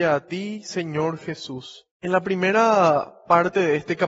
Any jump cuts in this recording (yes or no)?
yes